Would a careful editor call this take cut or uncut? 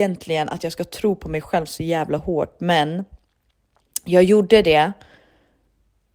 uncut